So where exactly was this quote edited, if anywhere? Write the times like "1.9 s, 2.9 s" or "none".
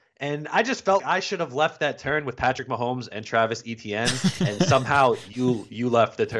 1.0 s